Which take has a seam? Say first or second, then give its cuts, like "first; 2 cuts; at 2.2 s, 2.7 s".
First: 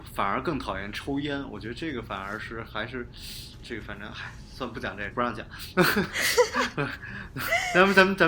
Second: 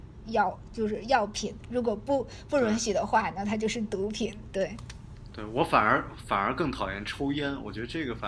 first; 1 cut; at 5.1 s